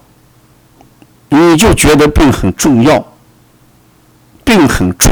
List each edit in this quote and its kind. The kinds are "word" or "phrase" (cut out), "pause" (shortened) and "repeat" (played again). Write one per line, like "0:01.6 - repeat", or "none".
none